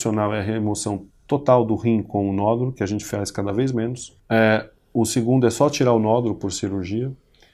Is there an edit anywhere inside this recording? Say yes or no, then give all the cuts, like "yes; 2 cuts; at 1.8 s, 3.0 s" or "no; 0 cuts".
yes; 1 cut; at 4.2 s